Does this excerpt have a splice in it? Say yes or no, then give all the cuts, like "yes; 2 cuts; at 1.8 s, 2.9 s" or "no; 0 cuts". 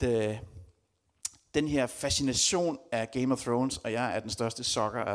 no; 0 cuts